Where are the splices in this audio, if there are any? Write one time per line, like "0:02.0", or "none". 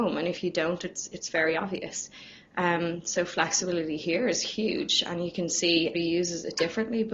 0:05.9

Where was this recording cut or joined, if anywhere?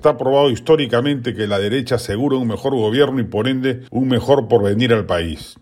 0:03.9

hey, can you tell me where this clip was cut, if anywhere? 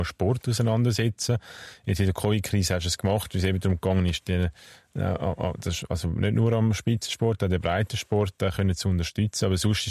none

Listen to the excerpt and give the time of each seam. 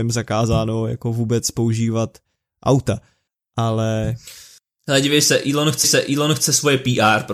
0:05.8

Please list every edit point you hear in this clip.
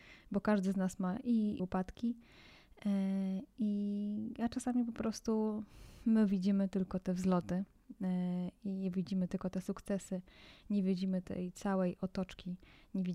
0:01.6

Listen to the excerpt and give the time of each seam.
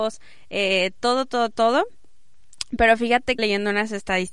0:03.4

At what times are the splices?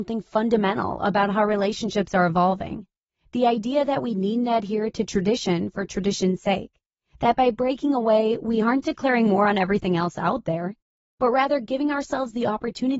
none

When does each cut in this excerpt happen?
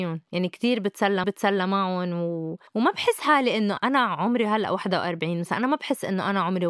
0:01.2
0:02.7
0:03.8

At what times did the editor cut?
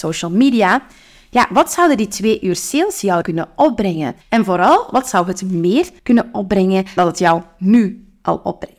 0:03.2
0:04.2
0:06.0
0:07.0

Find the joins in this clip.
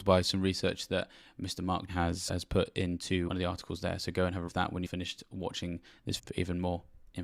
0:01.9
0:02.3
0:03.3
0:04.5
0:04.9
0:06.2

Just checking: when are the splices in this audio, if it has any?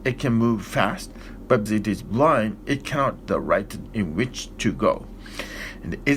0:01.7
0:03.2
0:03.9

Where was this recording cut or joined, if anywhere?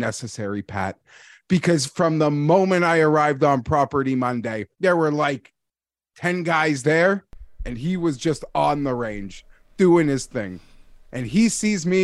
0:04.7

